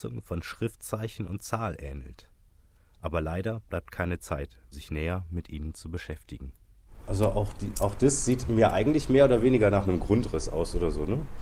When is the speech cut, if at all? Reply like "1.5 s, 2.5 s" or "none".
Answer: 4.7 s

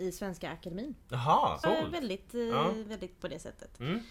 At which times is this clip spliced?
1.0 s, 1.6 s, 3.2 s

